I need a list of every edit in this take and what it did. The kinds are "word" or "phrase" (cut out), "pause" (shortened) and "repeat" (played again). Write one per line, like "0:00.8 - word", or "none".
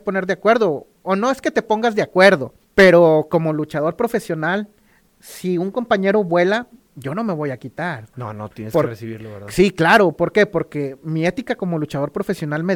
0:02.6 - pause